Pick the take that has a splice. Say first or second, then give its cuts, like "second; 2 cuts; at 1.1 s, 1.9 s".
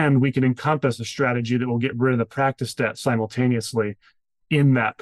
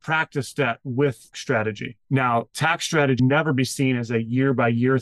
second; 3 cuts; at 1.3 s, 2.0 s, 3.2 s